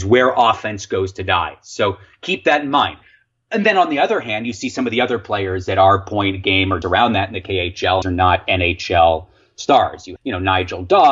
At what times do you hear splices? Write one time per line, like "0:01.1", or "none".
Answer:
0:06.8
0:08.0
0:10.2